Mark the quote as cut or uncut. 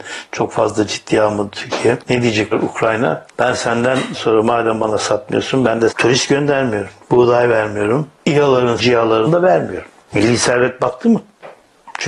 cut